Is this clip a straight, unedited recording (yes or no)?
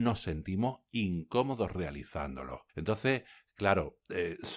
no